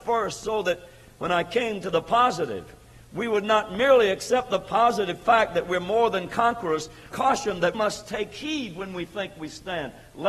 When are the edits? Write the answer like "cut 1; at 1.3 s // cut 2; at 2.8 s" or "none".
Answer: cut 1; at 7.1 s // cut 2; at 7.7 s